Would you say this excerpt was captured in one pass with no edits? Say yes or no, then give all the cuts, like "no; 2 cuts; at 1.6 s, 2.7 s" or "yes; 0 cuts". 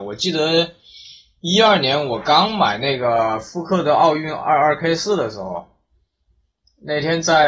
yes; 0 cuts